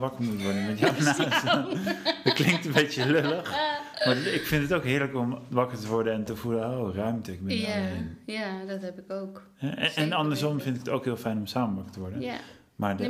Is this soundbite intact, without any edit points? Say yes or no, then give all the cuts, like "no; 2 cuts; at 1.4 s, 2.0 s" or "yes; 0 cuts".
yes; 0 cuts